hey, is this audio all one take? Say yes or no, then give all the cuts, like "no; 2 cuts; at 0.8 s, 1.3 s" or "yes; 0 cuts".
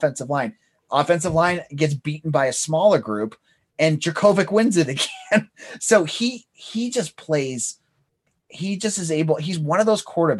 yes; 0 cuts